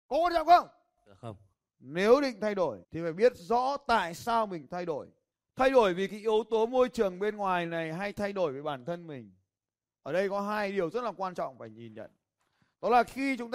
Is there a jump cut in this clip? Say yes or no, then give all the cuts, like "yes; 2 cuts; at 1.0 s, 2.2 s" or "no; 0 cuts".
yes; 2 cuts; at 2.8 s, 5.3 s